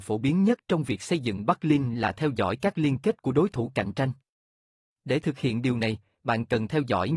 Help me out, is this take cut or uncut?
uncut